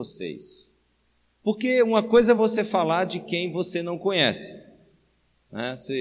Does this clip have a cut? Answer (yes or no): no